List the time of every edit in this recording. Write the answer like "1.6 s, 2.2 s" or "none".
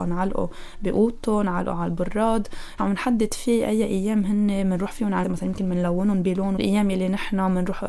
2.8 s, 5.2 s, 6.6 s

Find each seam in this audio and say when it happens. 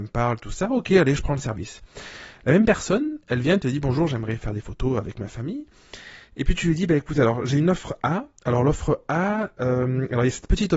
none

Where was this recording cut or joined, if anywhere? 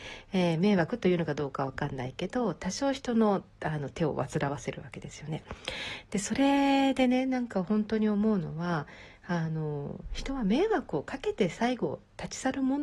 3.5 s

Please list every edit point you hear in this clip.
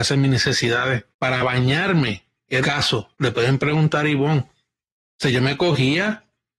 1.1 s, 2.6 s, 3.1 s

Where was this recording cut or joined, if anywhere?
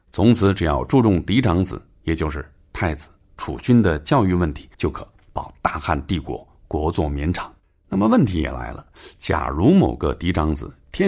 4.7 s, 7.6 s

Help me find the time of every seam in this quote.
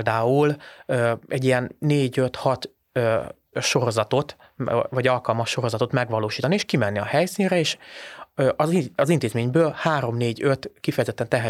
3.5 s

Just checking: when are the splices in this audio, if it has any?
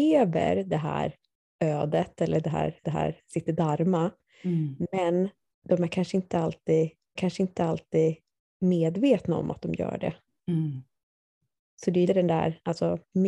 2.8 s, 7.2 s, 12.1 s

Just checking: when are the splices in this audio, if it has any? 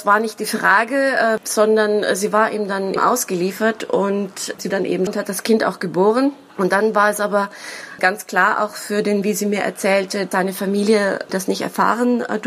3.0 s, 4.7 s, 5.1 s, 8.0 s, 9.2 s, 10.3 s, 11.3 s

